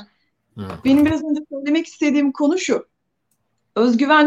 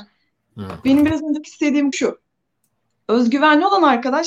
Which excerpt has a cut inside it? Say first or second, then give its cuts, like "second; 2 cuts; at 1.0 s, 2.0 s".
second; 2 cuts; at 1.4 s, 1.9 s